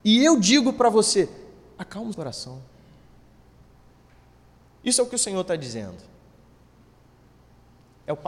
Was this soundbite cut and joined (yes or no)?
yes